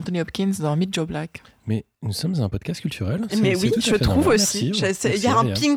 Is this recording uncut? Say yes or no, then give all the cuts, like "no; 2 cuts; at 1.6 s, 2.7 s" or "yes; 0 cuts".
yes; 0 cuts